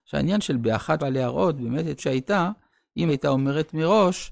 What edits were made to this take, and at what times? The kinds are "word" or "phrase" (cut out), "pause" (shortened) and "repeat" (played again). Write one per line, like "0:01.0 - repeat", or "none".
0:01.0 - word
0:02.0 - word
0:03.1 - word